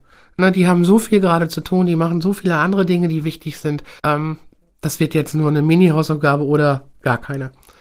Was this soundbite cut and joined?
yes; 1 cut; at 4.0 s

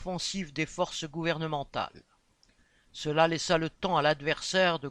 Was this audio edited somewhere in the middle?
no; 0 cuts

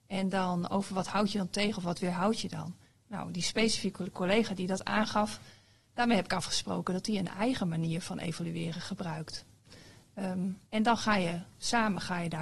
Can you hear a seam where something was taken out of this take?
yes; 1 cut; at 10.7 s

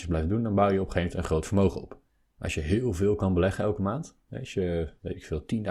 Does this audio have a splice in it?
yes; 1 cut; at 2.1 s

